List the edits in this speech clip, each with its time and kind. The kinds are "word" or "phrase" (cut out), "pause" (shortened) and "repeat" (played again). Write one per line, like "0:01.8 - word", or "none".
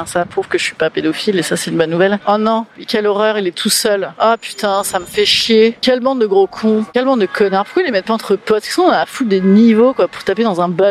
none